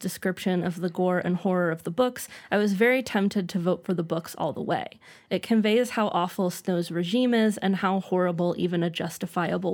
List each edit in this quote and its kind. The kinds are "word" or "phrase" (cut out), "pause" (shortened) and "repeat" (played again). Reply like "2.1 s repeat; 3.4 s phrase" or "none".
none